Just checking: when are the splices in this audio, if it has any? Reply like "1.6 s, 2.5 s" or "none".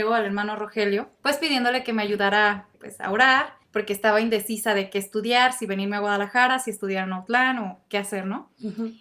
1.1 s, 2.7 s, 3.6 s